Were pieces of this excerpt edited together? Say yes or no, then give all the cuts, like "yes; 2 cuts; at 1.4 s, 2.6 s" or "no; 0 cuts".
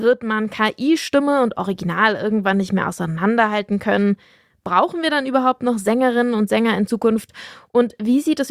no; 0 cuts